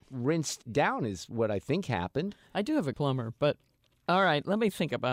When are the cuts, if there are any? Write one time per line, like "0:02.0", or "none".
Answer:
0:02.9